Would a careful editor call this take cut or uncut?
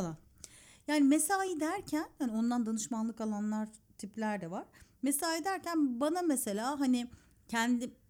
uncut